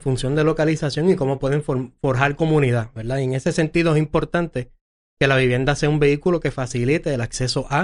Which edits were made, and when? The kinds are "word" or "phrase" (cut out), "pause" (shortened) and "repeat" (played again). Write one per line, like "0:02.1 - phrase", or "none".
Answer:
none